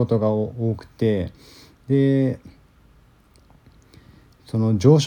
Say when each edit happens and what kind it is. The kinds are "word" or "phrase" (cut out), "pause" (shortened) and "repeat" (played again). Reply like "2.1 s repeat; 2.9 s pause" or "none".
none